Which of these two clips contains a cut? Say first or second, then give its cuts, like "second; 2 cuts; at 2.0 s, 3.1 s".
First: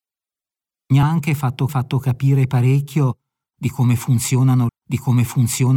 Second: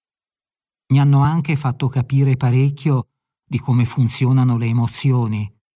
first; 3 cuts; at 1.0 s, 1.7 s, 4.7 s